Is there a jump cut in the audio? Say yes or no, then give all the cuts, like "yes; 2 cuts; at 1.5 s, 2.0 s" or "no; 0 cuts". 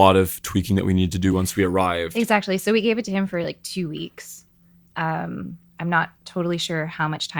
no; 0 cuts